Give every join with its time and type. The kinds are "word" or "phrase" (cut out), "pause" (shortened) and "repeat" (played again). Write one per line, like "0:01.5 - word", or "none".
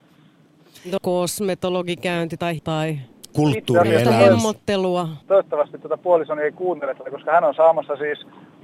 0:01.0 - word
0:02.6 - word
0:05.2 - pause